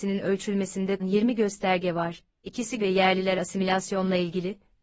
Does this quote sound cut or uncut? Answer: cut